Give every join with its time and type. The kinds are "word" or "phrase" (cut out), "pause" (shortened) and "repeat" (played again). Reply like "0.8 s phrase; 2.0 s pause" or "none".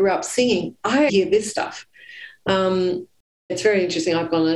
1.1 s word; 3.5 s word